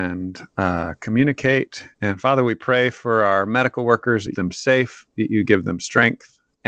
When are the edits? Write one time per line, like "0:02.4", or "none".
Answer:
0:01.9
0:04.3